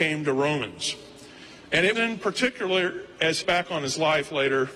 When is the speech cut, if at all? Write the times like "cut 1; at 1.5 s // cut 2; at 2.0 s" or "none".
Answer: cut 1; at 1.9 s // cut 2; at 3.4 s